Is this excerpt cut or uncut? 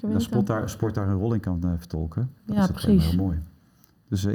uncut